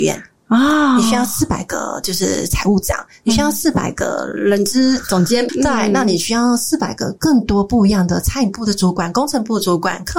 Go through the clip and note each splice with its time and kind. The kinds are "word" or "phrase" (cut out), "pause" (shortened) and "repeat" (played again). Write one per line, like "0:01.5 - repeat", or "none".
0:05.5 - word